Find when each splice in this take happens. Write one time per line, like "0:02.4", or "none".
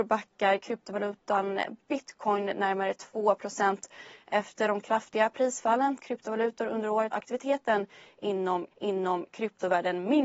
0:06.0
0:07.1
0:08.7